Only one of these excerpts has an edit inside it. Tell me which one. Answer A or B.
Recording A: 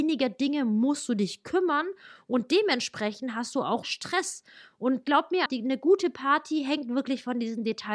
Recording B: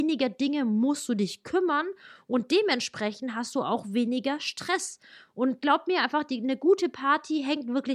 A